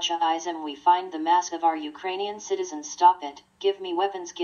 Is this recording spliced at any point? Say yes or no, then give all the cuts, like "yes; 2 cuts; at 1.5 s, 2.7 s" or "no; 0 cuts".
yes; 2 cuts; at 1.5 s, 3.5 s